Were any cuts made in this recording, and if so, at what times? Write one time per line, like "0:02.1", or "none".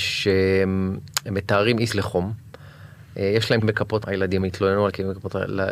0:01.9
0:03.6
0:04.0
0:04.4